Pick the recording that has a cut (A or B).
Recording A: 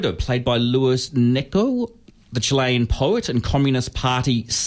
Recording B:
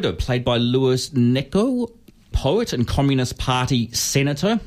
B